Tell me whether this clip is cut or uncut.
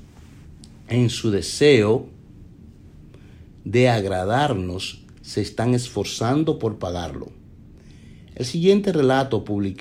uncut